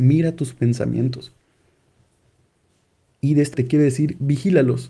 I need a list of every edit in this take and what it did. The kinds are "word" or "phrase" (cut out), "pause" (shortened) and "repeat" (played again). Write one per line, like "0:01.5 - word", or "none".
0:03.5 - word